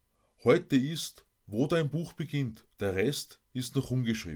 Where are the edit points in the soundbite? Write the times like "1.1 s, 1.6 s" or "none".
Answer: 2.7 s

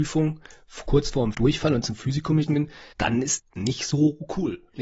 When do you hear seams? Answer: 1.3 s, 1.8 s, 2.5 s, 2.9 s, 3.4 s

